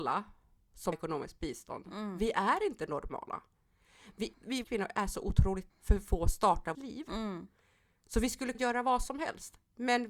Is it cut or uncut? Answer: cut